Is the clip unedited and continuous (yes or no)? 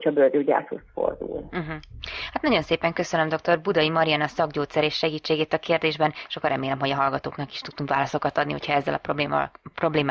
yes